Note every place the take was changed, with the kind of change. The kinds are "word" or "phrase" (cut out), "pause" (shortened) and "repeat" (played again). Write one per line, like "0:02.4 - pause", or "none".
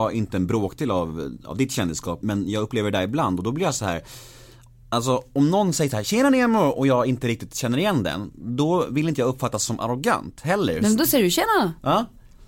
0:02.2 - word